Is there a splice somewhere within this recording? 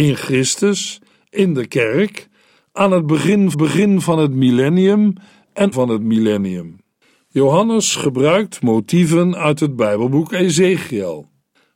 yes; 2 cuts; at 3.5 s, 5.7 s

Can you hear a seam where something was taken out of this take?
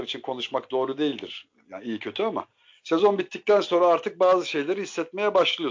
no; 0 cuts

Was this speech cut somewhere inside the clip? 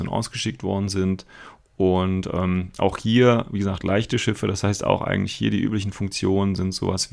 no; 0 cuts

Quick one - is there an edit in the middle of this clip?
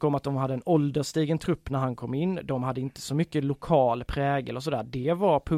no; 0 cuts

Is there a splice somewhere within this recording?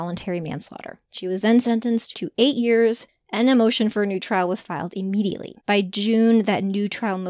yes; 3 cuts; at 1.0 s, 2.1 s, 5.6 s

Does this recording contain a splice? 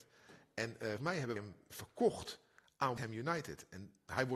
yes; 4 cuts; at 1.0 s, 1.4 s, 1.7 s, 3.0 s

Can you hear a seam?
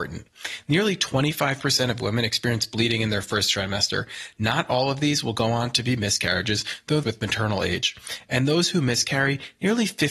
yes; 1 cut; at 7.0 s

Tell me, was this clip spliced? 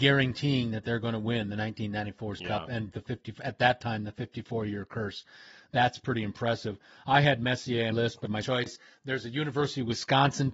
yes; 4 cuts; at 2.4 s, 2.9 s, 7.9 s, 8.4 s

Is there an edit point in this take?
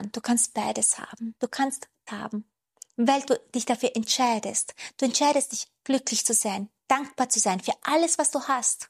yes; 1 cut; at 2.1 s

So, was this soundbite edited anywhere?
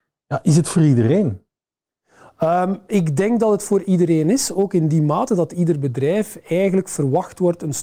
no; 0 cuts

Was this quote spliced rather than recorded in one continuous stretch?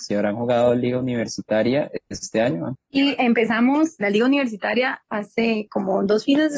yes; 1 cut; at 4.0 s

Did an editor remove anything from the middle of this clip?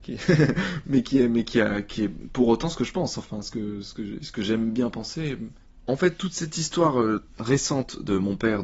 no; 0 cuts

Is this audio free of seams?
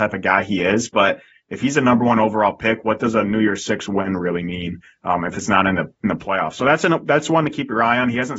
yes; 0 cuts

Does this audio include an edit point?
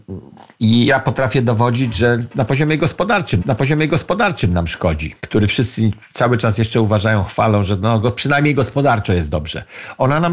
yes; 2 cuts; at 3.4 s, 5.2 s

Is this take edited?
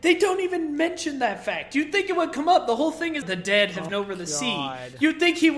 yes; 2 cuts; at 3.2 s, 3.9 s

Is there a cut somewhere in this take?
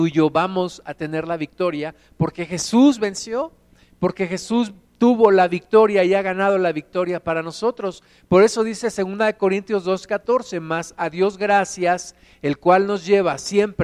no; 0 cuts

